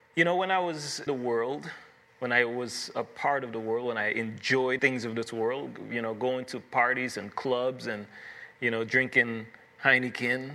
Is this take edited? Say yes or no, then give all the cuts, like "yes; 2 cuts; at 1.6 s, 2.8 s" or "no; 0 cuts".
yes; 2 cuts; at 1.1 s, 4.8 s